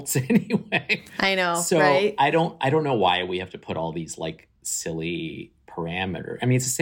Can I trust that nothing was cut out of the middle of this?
no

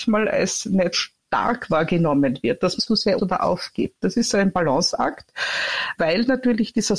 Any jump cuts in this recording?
yes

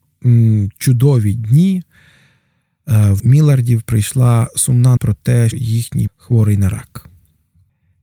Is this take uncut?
no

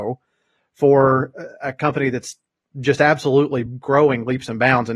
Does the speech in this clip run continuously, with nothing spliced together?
yes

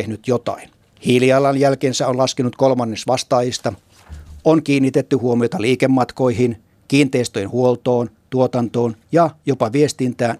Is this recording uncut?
yes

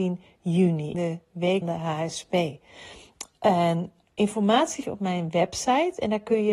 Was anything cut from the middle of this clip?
yes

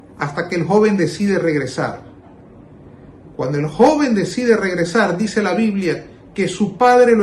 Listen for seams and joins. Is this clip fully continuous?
yes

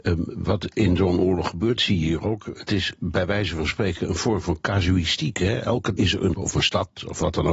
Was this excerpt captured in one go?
no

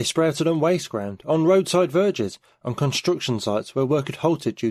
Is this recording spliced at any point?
no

